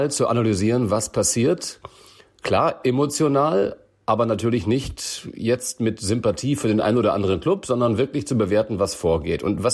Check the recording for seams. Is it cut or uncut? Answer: uncut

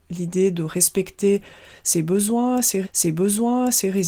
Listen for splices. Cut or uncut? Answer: cut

